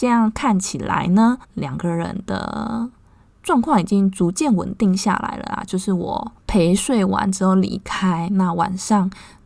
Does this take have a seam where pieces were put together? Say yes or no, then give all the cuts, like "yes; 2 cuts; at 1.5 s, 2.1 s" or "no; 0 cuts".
yes; 1 cut; at 1.4 s